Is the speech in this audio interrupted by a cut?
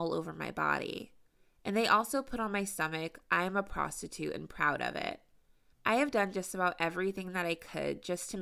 no; 0 cuts

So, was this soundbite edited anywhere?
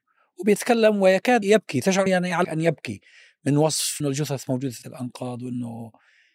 yes; 5 cuts; at 1.4 s, 2.1 s, 2.4 s, 4.0 s, 4.8 s

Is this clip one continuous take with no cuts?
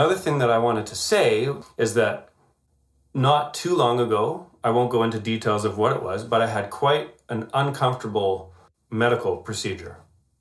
yes; 0 cuts

